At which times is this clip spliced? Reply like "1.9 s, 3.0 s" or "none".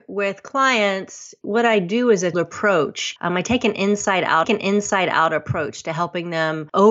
2.3 s, 4.4 s